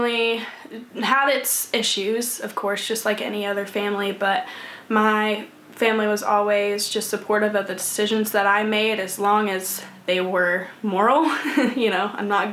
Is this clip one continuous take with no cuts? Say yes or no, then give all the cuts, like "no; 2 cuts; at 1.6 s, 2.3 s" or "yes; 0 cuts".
yes; 0 cuts